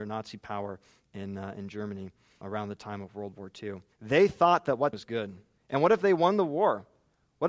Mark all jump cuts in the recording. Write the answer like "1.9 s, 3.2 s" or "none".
2.4 s, 3.9 s, 4.9 s, 5.6 s